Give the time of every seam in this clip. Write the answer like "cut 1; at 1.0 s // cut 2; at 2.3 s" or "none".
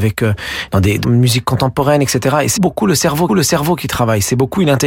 cut 1; at 1.0 s // cut 2; at 2.6 s // cut 3; at 3.3 s